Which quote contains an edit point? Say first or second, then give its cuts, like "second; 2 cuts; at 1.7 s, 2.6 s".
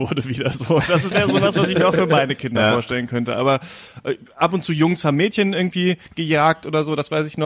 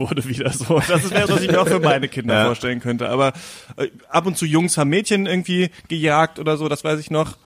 second; 1 cut; at 1.3 s